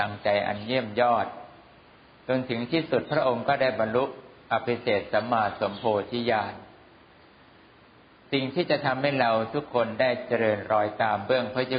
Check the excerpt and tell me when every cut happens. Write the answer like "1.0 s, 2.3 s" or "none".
none

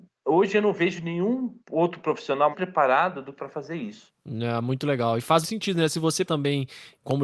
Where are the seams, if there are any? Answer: 1.6 s, 2.5 s, 3.4 s, 4.2 s, 5.4 s, 6.3 s

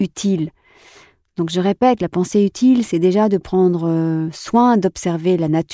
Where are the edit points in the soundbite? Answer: none

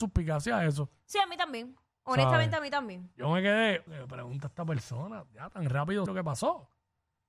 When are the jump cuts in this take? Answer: 3.9 s, 6.1 s

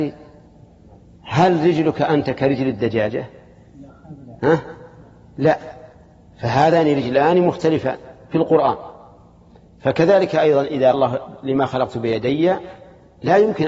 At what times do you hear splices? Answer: 10.9 s

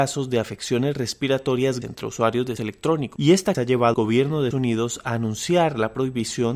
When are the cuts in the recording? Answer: 1.8 s, 2.6 s, 3.5 s, 3.9 s, 4.5 s

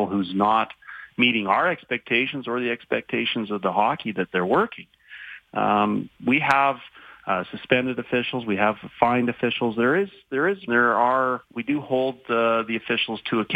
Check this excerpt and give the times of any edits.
10.7 s, 11.4 s

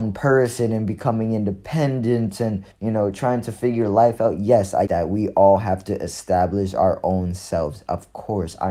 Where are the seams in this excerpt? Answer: 2.7 s, 4.9 s

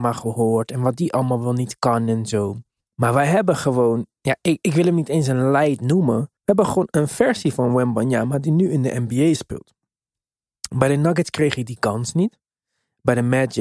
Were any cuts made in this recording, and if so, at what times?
2.8 s, 6.4 s

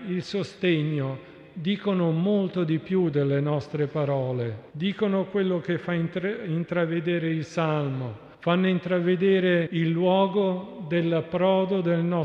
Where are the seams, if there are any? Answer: 4.7 s, 8.3 s, 9.7 s

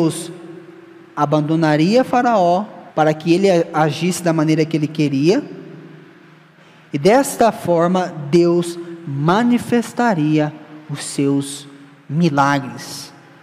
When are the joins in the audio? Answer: 2.9 s

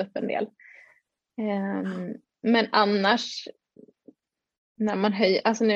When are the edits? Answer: 2.3 s

